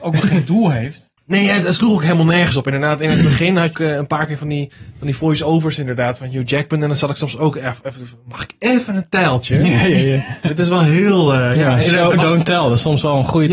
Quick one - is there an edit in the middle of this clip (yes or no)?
yes